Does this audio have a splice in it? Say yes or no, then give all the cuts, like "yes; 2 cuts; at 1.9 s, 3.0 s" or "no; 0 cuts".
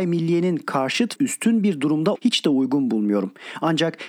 yes; 2 cuts; at 1.2 s, 2.1 s